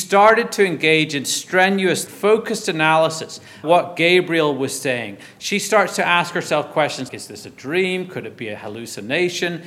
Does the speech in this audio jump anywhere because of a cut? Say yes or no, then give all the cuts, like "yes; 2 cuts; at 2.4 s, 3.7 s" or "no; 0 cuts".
yes; 3 cuts; at 2.1 s, 3.6 s, 7.1 s